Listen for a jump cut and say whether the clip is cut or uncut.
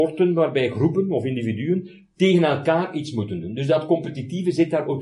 uncut